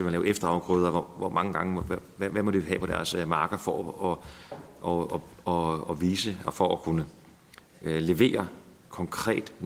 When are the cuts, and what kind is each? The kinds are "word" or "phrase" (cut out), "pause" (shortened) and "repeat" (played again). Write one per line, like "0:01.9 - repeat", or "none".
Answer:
none